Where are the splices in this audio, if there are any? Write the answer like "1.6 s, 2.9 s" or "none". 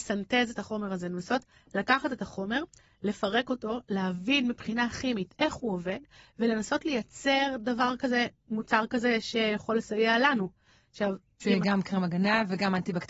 none